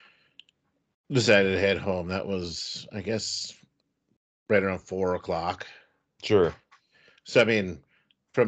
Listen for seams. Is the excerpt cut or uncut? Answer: uncut